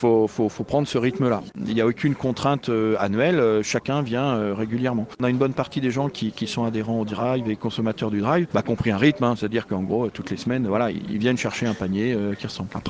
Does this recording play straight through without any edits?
yes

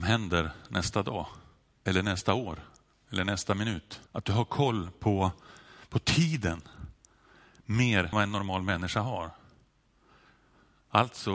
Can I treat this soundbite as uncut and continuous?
no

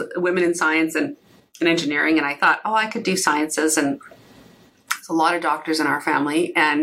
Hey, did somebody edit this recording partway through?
no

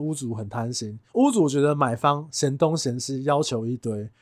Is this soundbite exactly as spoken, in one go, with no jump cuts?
no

